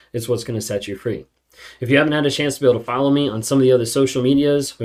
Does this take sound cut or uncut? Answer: uncut